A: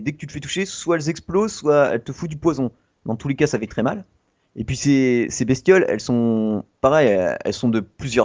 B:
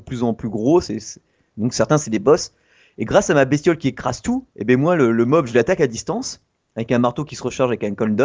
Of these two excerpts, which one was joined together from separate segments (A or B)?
B